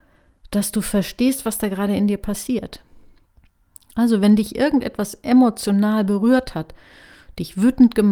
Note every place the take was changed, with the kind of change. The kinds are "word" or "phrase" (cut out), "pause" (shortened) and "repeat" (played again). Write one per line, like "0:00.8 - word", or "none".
0:03.2 - pause